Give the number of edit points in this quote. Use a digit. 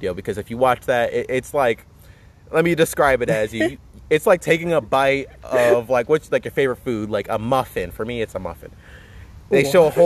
0